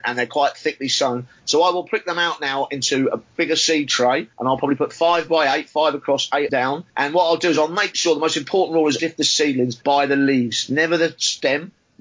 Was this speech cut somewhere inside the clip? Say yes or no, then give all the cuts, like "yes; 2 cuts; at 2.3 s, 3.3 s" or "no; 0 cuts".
yes; 5 cuts; at 4.3 s, 6.5 s, 6.9 s, 9.0 s, 9.8 s